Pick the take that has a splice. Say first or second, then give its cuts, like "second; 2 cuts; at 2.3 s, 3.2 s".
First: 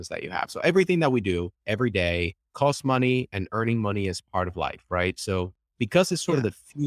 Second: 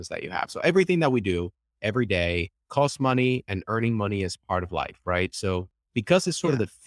first; 1 cut; at 1.6 s